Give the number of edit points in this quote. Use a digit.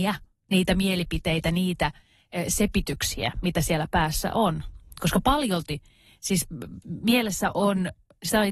0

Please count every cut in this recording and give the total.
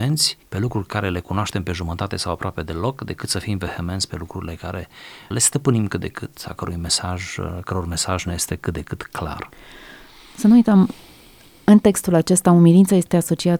0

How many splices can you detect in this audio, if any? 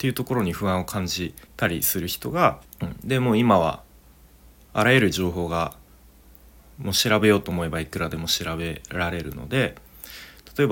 2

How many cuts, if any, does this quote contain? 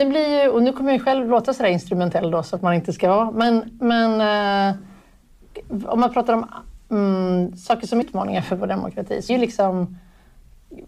3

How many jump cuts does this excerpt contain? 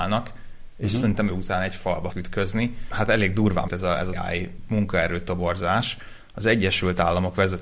4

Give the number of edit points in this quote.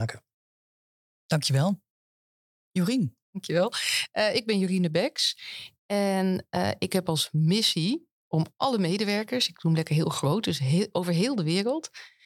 1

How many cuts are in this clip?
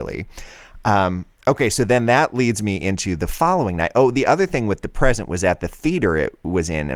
0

